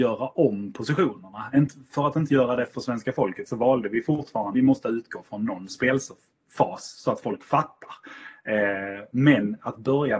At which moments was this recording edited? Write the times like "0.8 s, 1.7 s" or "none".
2.7 s, 4.5 s